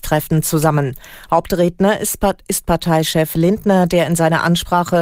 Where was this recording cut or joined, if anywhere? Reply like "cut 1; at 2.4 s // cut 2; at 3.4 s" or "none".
none